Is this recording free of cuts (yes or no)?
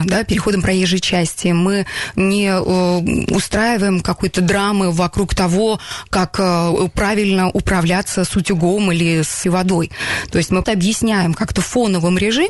no